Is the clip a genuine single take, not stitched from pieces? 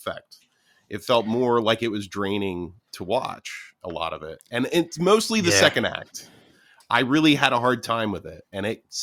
yes; 0 cuts

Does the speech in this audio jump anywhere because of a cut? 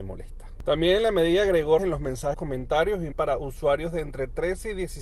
yes; 3 cuts; at 1.8 s, 2.3 s, 3.1 s

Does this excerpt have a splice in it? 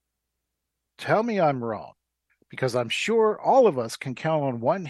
yes; 1 cut; at 2.3 s

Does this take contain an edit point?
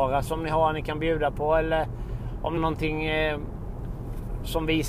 yes; 1 cut; at 2.6 s

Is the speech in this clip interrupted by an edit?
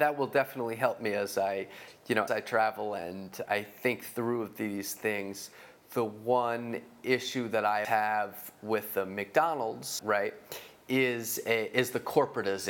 yes; 4 cuts; at 2.3 s, 3.5 s, 7.8 s, 10.0 s

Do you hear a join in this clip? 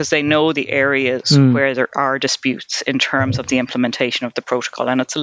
no; 0 cuts

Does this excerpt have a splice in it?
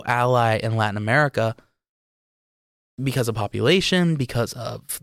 no; 0 cuts

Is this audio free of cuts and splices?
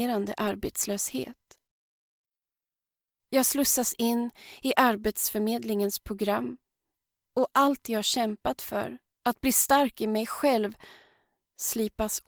yes; 0 cuts

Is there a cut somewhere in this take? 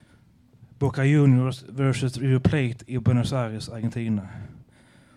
no; 0 cuts

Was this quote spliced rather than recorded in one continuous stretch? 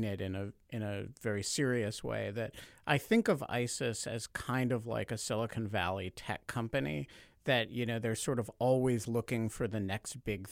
no; 0 cuts

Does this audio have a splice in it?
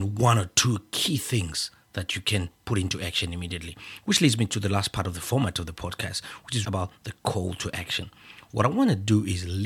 yes; 1 cut; at 6.6 s

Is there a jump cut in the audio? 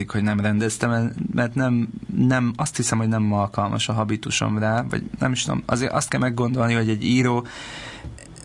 no; 0 cuts

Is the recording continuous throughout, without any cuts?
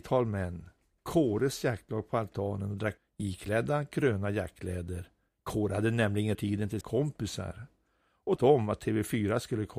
no; 5 cuts; at 3.0 s, 5.3 s, 6.3 s, 6.8 s, 8.4 s

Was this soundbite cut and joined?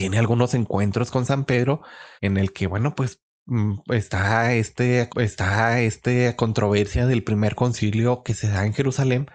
yes; 2 cuts; at 2.2 s, 5.1 s

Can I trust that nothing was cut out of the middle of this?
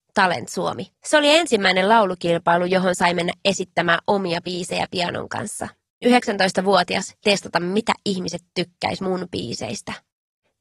no; 3 cuts; at 0.9 s, 6.0 s, 7.2 s

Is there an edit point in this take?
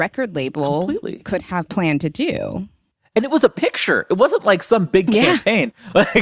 no; 0 cuts

